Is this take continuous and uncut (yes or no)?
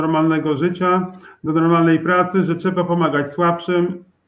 yes